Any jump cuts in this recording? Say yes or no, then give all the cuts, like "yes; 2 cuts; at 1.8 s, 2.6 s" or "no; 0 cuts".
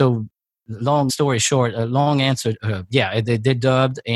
yes; 1 cut; at 1.1 s